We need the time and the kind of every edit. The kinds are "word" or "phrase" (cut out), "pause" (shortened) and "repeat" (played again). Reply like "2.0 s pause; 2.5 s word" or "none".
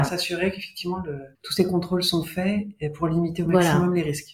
1.3 s pause